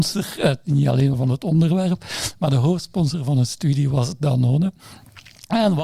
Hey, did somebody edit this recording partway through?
yes; 1 cut; at 1.1 s

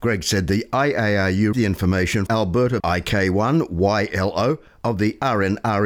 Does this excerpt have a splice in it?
yes; 3 cuts; at 1.5 s, 2.3 s, 2.8 s

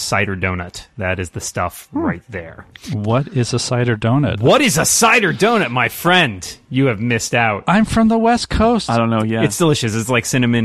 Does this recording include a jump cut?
no; 0 cuts

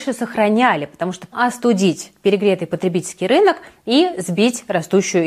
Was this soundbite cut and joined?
yes; 1 cut; at 1.3 s

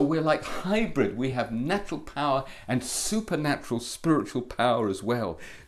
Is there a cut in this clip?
no; 0 cuts

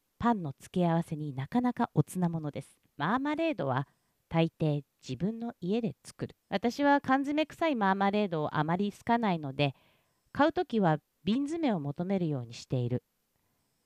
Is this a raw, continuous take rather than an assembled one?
no; 2 cuts; at 2.9 s, 6.4 s

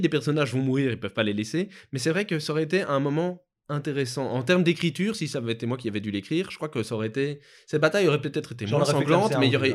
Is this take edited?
no; 0 cuts

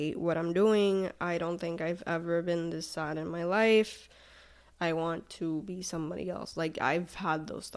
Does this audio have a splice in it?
no; 0 cuts

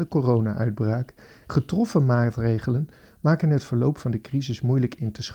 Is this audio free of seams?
no; 1 cut; at 1.5 s

